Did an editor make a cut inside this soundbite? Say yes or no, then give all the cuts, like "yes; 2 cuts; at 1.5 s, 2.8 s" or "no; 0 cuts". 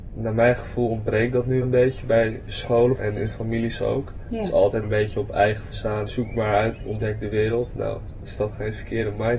yes; 6 cuts; at 1.6 s, 3.0 s, 4.8 s, 5.7 s, 6.1 s, 8.3 s